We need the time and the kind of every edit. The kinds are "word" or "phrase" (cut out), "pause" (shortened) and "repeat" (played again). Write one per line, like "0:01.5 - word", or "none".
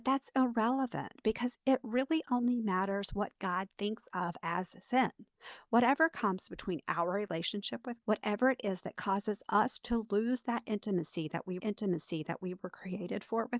0:08.0 - word
0:11.6 - repeat